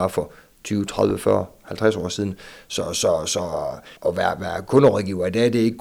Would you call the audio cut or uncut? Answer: cut